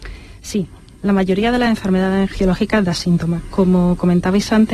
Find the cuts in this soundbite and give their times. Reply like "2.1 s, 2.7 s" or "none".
none